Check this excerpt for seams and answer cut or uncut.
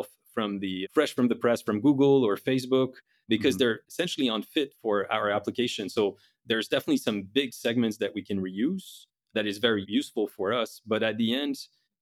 uncut